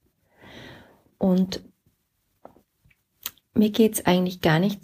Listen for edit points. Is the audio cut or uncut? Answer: uncut